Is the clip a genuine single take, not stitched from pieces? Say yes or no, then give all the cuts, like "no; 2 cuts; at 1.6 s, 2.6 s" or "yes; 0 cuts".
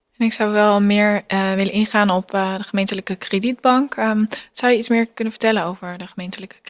yes; 0 cuts